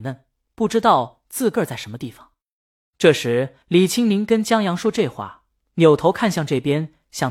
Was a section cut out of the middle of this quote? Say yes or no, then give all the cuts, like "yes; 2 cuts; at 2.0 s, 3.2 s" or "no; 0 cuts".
yes; 1 cut; at 3.6 s